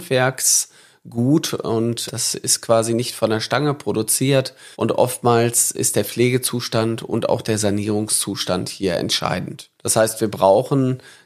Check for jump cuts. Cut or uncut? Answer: cut